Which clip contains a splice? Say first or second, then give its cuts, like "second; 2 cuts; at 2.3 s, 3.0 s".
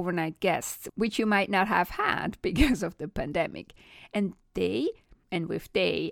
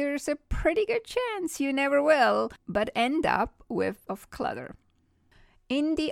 second; 2 cuts; at 2.6 s, 4.1 s